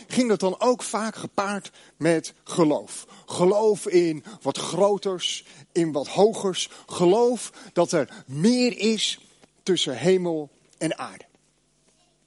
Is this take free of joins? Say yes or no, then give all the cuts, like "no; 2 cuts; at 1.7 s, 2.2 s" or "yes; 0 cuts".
yes; 0 cuts